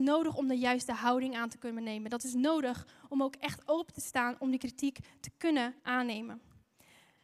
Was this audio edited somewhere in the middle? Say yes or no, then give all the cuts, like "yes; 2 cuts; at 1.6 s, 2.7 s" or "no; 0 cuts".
yes; 1 cut; at 5.8 s